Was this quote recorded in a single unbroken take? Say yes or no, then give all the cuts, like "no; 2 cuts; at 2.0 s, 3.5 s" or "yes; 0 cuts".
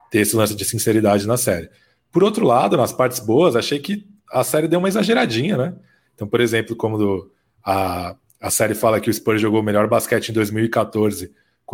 yes; 0 cuts